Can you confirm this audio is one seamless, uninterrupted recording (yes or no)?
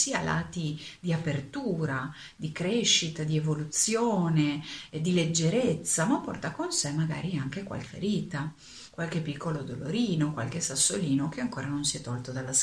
no